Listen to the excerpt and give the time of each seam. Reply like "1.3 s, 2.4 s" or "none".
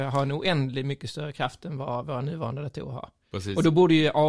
none